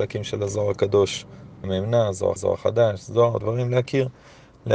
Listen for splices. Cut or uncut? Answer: cut